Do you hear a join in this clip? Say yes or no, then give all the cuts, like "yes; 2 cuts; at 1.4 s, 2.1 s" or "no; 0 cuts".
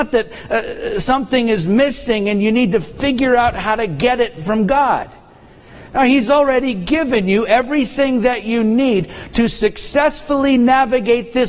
no; 0 cuts